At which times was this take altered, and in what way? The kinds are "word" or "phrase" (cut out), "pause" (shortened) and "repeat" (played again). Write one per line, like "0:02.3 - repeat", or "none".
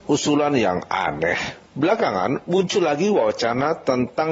0:01.7 - pause